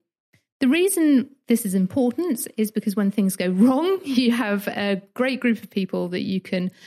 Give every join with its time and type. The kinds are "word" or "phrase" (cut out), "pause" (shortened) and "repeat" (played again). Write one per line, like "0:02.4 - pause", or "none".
none